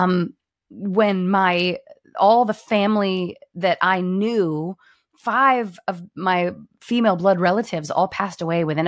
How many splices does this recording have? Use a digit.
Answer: 0